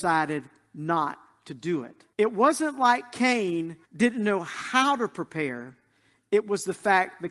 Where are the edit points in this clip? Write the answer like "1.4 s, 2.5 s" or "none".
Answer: 2.1 s, 3.8 s